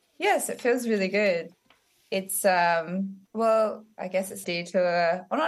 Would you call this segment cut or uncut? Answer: cut